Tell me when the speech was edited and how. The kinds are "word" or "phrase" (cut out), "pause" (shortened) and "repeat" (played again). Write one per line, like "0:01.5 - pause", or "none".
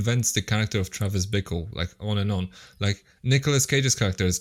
none